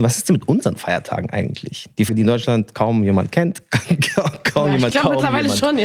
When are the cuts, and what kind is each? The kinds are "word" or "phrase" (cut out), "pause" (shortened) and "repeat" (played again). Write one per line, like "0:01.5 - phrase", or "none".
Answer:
0:02.1 - word
0:04.9 - word